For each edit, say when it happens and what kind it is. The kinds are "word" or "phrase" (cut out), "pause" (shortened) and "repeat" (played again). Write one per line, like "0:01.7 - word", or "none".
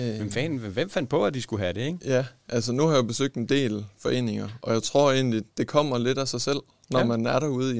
0:05.5 - pause